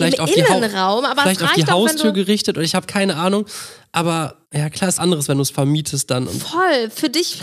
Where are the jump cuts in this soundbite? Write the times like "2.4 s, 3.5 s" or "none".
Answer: 4.4 s, 5.0 s

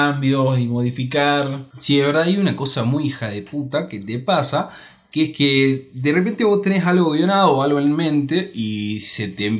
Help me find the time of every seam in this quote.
1.7 s

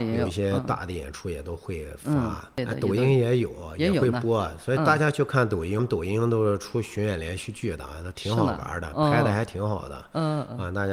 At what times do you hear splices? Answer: 5.8 s

